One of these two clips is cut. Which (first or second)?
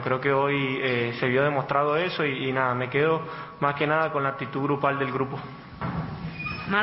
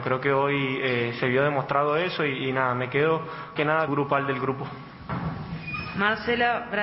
second